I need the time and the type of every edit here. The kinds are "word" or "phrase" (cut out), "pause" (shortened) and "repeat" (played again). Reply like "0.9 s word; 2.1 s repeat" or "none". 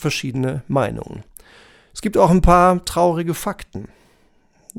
none

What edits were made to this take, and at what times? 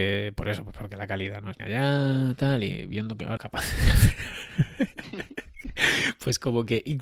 1.6 s word; 3.4 s phrase

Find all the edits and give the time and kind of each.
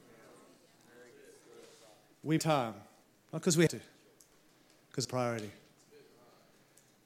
2.4 s word; 3.0 s pause; 3.7 s word; 5.0 s phrase

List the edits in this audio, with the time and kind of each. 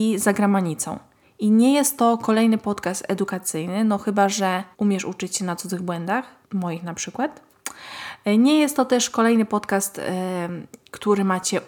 1.2 s pause; 4.7 s pause; 6.4 s pause

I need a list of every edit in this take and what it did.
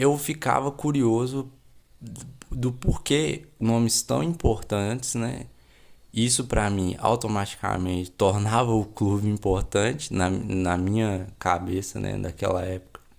none

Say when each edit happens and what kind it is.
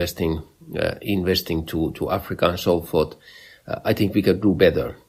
none

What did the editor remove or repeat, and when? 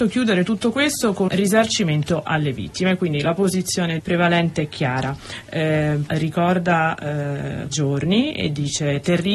1.3 s word; 4.0 s word; 6.1 s word; 7.7 s word

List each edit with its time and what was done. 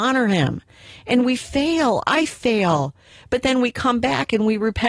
none

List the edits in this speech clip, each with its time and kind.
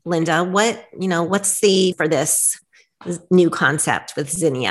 1.9 s word

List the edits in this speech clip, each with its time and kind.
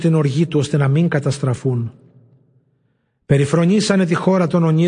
none

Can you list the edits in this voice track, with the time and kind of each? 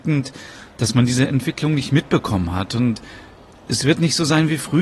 none

